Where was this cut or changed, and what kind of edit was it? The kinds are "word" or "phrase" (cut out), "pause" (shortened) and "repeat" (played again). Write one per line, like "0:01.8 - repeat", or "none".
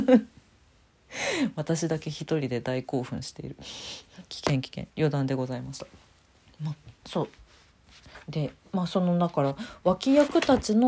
none